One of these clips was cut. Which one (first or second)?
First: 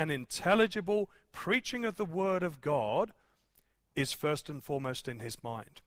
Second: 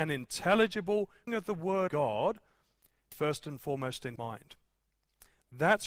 second